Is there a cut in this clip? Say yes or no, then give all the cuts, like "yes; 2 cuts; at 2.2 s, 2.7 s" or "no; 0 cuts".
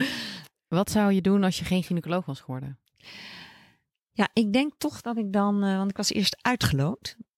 no; 0 cuts